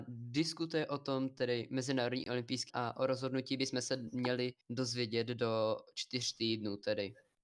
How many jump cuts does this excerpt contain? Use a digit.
2